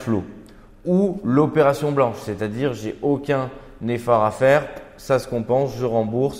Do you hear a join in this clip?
no; 0 cuts

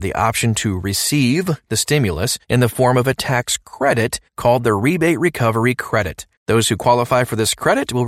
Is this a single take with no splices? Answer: no; 3 cuts; at 2.4 s, 4.3 s, 6.4 s

